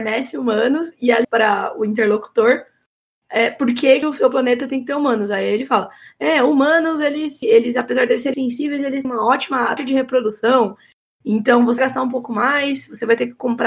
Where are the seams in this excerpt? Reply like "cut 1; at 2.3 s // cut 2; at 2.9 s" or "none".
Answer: cut 1; at 1.2 s // cut 2; at 4.0 s // cut 3; at 7.4 s // cut 4; at 8.3 s // cut 5; at 9.0 s // cut 6; at 9.8 s // cut 7; at 11.8 s